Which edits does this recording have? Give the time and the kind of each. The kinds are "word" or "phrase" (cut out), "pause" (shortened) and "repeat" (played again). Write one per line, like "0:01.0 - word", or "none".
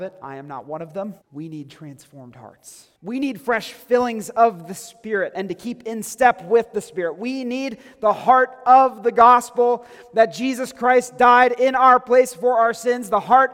0:01.2 - pause
0:03.0 - pause